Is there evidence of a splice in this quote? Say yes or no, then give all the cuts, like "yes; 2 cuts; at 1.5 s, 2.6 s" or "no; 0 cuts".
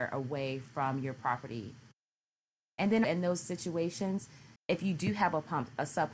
yes; 2 cuts; at 3.0 s, 4.6 s